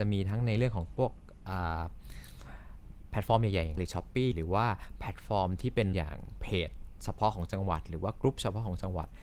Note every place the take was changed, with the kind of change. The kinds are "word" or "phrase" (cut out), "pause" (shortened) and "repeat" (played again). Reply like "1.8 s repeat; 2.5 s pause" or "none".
3.8 s word; 4.3 s word; 5.9 s word